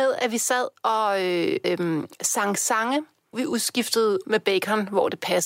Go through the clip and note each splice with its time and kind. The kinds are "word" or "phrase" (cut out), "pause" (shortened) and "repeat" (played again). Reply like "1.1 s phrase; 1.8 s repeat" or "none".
1.6 s word; 3.3 s word; 4.2 s word